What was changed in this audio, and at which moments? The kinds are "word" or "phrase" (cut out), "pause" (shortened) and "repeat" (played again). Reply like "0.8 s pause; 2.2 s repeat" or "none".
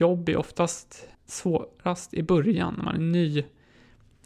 1.1 s pause